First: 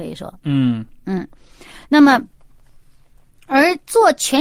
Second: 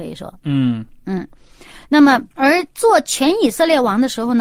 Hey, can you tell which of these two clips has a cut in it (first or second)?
second